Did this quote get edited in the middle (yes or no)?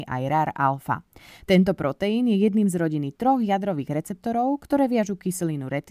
no